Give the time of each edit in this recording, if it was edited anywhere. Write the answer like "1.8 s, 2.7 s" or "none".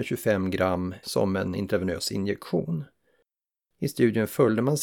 1.0 s